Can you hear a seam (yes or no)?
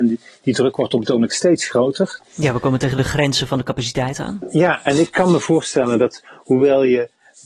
no